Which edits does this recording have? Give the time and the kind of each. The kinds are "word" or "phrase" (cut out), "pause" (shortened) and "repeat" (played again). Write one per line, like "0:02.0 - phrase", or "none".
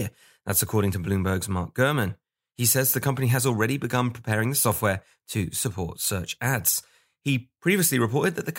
none